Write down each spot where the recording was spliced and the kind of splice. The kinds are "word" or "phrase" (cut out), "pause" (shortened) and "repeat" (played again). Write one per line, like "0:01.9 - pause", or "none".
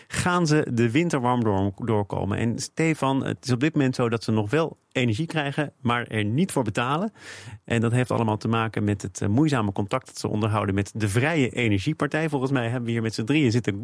none